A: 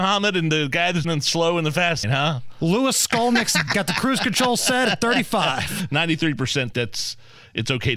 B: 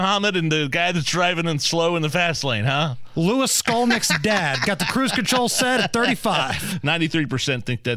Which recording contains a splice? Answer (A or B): A